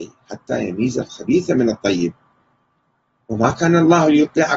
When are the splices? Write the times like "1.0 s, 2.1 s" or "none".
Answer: none